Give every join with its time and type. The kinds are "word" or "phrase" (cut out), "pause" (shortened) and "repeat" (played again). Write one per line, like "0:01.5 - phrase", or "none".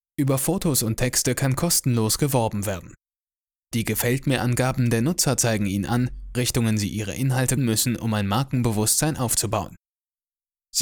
0:06.3 - phrase
0:07.6 - word